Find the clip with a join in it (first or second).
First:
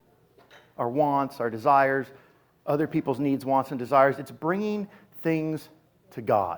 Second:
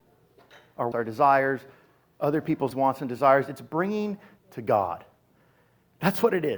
second